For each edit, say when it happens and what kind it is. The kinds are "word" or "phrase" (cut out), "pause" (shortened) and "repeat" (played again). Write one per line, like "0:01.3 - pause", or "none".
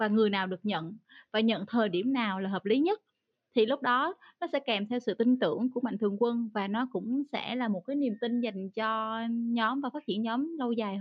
none